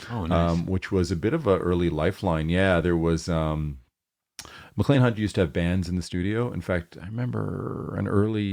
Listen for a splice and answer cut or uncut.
uncut